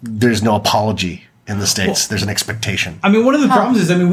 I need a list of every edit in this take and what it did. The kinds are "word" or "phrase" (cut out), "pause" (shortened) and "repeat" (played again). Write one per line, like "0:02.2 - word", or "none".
none